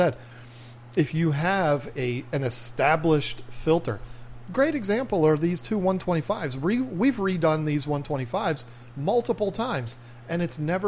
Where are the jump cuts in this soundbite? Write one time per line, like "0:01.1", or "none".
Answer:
0:01.9